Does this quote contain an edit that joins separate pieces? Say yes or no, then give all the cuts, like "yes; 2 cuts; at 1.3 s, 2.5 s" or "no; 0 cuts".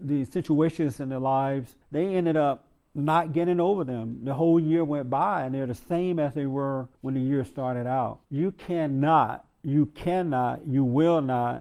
yes; 3 cuts; at 1.8 s, 6.9 s, 8.2 s